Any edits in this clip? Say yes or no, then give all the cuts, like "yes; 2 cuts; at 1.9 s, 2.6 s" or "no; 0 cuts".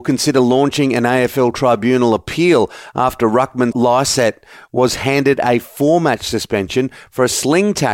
yes; 1 cut; at 3.7 s